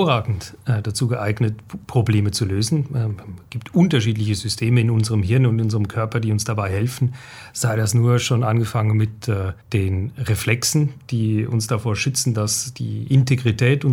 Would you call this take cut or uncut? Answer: cut